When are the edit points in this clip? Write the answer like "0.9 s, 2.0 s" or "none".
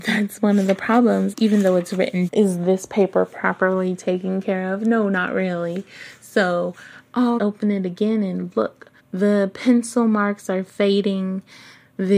1.3 s, 2.3 s, 7.4 s, 9.0 s